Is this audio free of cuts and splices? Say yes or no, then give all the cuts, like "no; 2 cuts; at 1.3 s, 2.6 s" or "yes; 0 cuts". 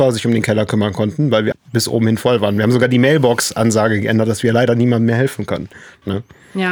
no; 1 cut; at 1.5 s